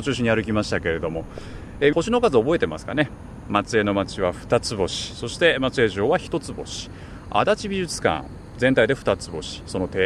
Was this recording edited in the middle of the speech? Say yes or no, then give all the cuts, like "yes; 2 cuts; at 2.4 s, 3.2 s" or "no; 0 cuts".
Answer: yes; 1 cut; at 1.9 s